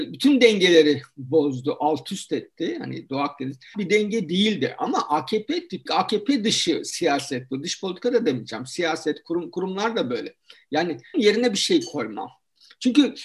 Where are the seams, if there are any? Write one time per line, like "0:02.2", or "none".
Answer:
0:03.7
0:05.9
0:11.1